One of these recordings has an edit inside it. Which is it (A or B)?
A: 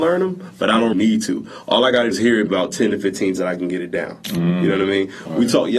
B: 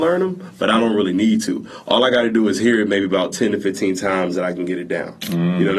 A